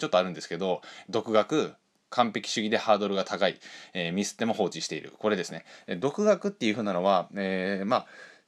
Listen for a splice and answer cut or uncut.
cut